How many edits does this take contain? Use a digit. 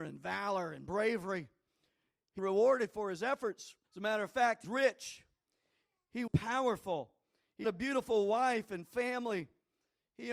5